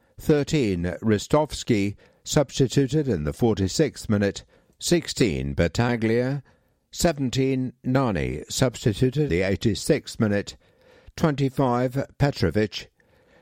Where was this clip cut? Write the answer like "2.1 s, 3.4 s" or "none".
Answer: 9.3 s